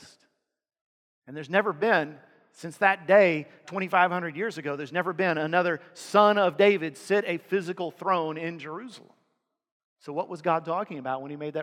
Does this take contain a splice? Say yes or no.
yes